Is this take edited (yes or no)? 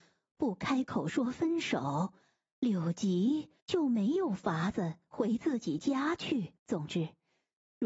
yes